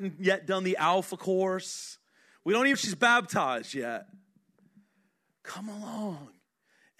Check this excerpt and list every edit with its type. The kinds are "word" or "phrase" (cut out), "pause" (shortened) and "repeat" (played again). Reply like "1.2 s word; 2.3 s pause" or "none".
2.7 s word